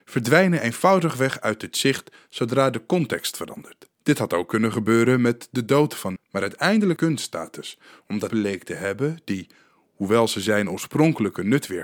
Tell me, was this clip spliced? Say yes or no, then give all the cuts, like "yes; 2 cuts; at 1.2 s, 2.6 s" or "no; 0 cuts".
yes; 4 cuts; at 3.9 s, 6.2 s, 7.0 s, 8.3 s